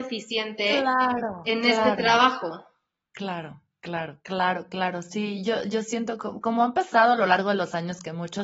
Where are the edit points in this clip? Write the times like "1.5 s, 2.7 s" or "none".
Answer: none